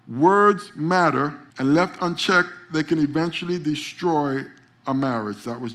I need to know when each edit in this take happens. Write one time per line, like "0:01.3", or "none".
0:01.5